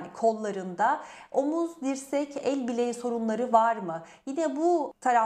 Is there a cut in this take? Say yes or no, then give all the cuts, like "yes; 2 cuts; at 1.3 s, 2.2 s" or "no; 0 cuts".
no; 0 cuts